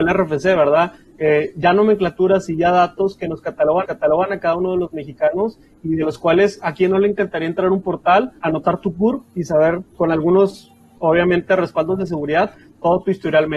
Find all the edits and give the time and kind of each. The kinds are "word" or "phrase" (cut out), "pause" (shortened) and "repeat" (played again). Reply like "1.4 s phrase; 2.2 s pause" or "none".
3.8 s repeat; 8.4 s pause; 9.9 s pause